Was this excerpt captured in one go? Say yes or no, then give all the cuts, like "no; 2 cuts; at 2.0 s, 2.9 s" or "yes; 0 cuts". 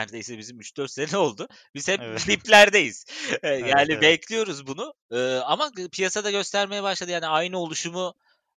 yes; 0 cuts